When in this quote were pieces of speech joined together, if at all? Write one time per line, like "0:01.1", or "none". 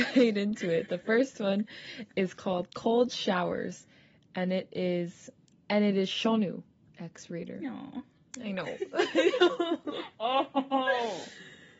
none